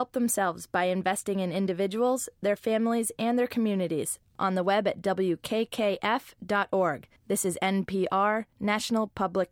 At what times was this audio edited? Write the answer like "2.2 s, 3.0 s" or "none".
7.2 s